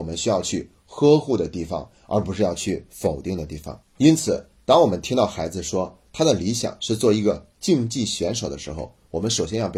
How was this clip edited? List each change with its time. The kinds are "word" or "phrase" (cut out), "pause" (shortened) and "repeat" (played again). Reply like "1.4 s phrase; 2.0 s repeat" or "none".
3.8 s pause

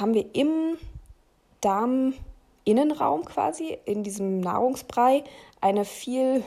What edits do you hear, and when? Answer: none

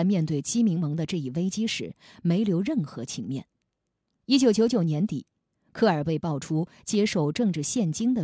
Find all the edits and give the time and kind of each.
none

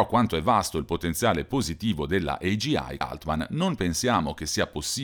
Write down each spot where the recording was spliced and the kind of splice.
3.0 s word

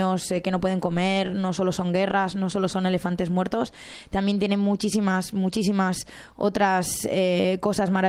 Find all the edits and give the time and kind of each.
none

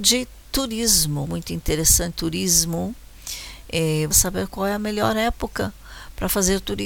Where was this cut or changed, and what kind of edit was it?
1.3 s phrase; 2.1 s word; 4.1 s phrase

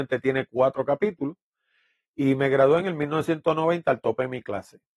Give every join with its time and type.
none

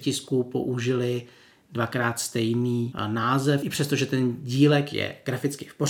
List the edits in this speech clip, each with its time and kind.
none

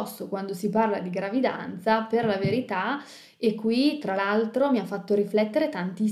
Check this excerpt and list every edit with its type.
none

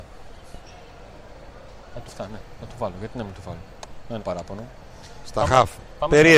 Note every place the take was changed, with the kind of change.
2.1 s word; 4.2 s word

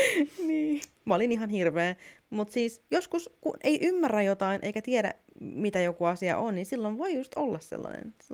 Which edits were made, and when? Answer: 0.9 s pause

